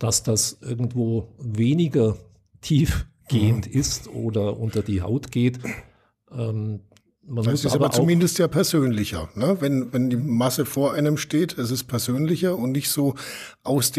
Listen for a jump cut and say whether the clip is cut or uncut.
uncut